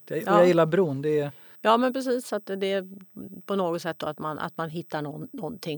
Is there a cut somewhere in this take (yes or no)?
no